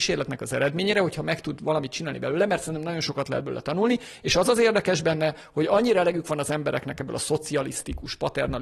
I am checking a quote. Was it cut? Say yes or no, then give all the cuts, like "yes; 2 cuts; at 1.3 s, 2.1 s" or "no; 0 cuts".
no; 0 cuts